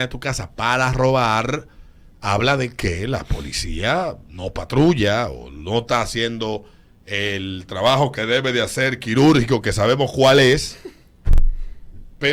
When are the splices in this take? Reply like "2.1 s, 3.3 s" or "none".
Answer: none